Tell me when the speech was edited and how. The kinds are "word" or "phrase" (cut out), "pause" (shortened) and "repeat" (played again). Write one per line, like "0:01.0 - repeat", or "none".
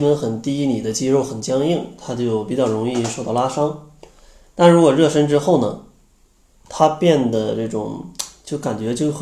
none

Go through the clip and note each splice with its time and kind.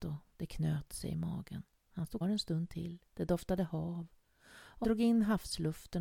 0:01.8 - pause
0:02.2 - word
0:03.1 - pause
0:04.8 - word

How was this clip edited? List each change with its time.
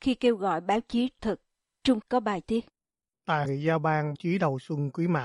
0:01.2 - word
0:02.0 - word
0:02.4 - word
0:03.4 - word
0:04.1 - word

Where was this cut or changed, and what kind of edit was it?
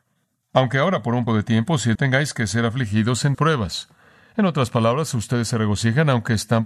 0:01.3 - word
0:01.9 - word
0:03.3 - word

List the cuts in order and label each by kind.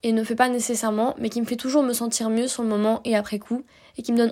none

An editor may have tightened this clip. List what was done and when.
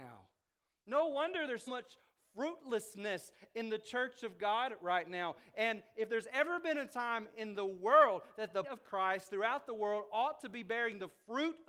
0:01.7 - word
0:08.6 - word

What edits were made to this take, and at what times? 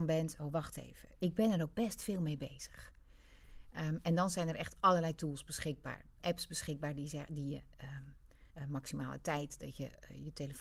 0:01.2 - word
0:06.2 - phrase
0:08.5 - pause

